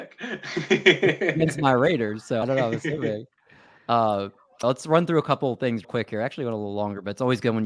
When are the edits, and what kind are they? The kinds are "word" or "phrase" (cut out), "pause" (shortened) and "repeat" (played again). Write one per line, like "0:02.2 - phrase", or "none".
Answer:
0:02.4 - word
0:04.6 - word
0:05.8 - word